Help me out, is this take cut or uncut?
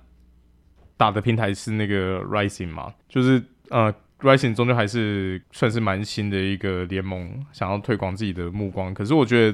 cut